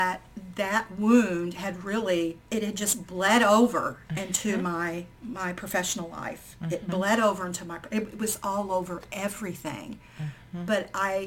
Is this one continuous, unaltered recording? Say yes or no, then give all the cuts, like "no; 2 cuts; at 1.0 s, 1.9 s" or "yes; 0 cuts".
no; 2 cuts; at 2.4 s, 5.1 s